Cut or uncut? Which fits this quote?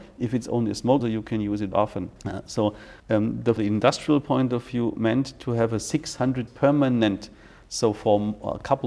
cut